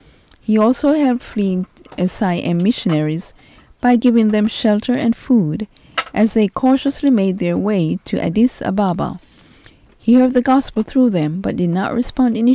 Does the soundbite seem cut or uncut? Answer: uncut